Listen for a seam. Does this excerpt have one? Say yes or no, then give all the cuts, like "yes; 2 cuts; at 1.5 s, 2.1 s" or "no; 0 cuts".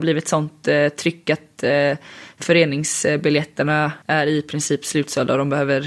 yes; 1 cut; at 4.0 s